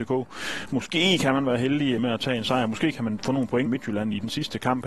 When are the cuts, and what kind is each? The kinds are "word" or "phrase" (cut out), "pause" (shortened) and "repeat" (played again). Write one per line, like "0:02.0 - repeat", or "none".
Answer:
0:02.0 - word
0:03.2 - word
0:03.7 - word